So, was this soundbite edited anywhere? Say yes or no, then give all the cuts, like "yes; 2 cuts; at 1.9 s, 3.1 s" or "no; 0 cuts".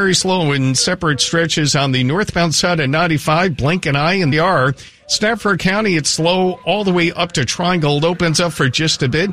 yes; 1 cut; at 4.3 s